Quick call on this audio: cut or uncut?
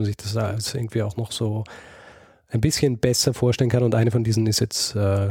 uncut